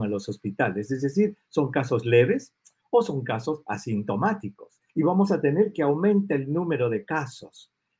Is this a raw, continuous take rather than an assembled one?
no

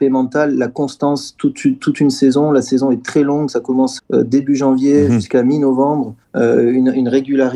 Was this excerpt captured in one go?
no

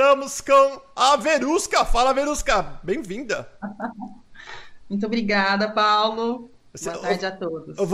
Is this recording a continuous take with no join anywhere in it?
yes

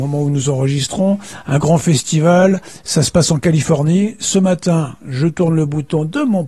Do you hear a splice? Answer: no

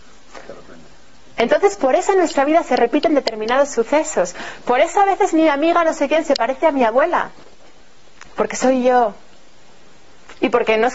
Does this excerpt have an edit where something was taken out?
no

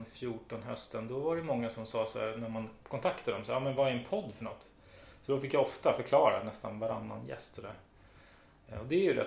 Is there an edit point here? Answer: no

